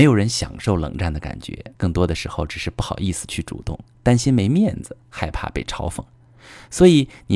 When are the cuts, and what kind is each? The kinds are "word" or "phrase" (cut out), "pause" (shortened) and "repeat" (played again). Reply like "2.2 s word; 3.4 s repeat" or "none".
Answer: 1.8 s pause